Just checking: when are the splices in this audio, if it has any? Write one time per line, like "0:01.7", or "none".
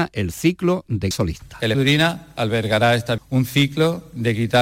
0:01.1
0:01.7
0:03.2